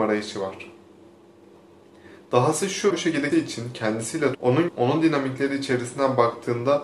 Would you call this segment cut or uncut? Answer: cut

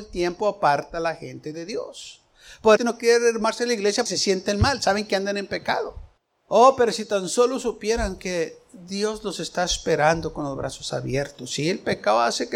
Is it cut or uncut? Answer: cut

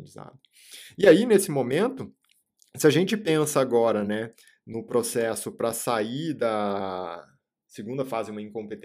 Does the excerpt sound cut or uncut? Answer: uncut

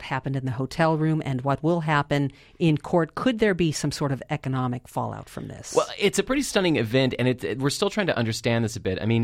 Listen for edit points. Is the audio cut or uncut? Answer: uncut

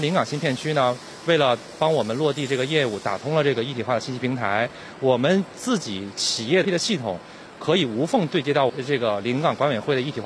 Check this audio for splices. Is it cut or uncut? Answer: cut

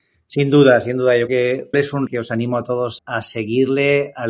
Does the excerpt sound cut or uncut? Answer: cut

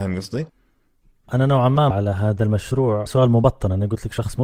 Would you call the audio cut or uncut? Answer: cut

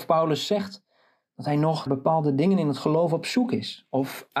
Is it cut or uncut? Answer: cut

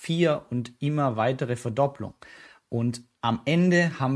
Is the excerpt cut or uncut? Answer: uncut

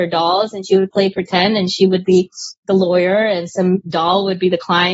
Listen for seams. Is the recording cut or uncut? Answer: uncut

